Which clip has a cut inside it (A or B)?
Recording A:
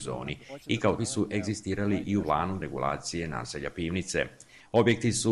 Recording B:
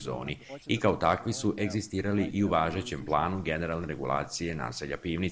A